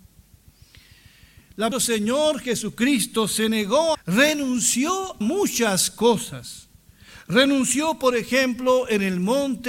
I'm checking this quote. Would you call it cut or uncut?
cut